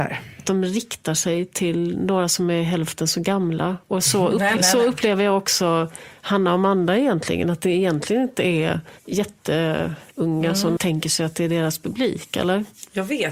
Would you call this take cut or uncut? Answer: cut